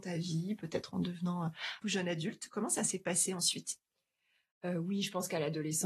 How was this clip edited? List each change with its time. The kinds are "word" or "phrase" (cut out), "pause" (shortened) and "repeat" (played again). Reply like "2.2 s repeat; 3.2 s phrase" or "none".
1.8 s word

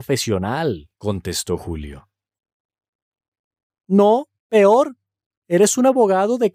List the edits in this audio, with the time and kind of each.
0.9 s pause; 4.4 s pause

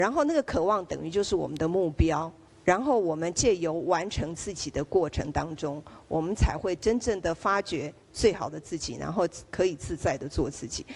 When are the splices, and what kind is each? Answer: 2.5 s pause

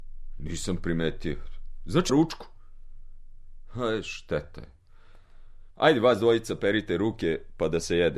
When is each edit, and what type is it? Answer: 2.1 s phrase; 5.7 s pause

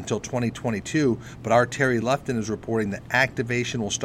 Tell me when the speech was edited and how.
none

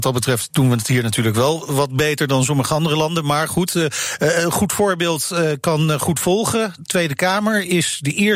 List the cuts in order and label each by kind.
none

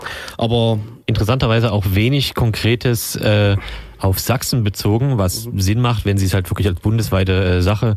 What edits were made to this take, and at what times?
1.0 s pause

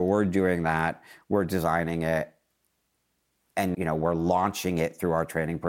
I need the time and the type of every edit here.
3.7 s word

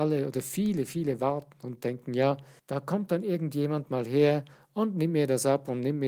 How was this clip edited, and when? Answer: 2.6 s pause

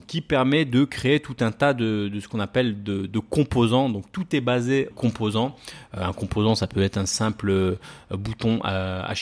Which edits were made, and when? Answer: 4.9 s phrase

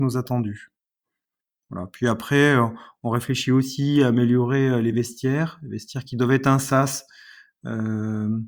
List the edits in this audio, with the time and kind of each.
none

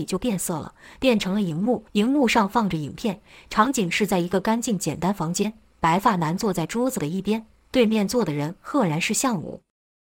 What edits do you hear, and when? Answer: 1.9 s pause

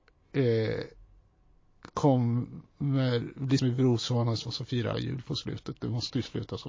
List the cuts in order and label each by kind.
3.6 s word; 4.5 s word; 4.9 s word

